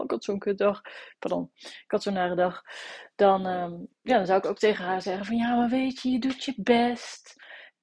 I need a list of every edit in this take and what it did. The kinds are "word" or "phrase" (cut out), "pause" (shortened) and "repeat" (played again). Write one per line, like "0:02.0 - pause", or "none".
none